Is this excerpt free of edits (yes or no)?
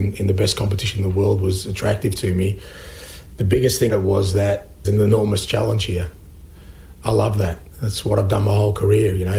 no